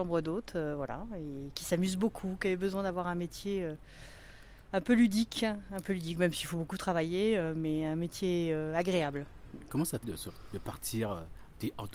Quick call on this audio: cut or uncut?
cut